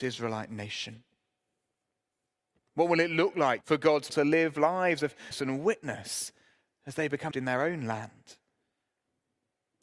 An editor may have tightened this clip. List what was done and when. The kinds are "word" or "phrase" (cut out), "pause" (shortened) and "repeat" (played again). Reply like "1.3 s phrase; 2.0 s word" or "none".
3.6 s word; 4.1 s word; 5.3 s word; 7.3 s word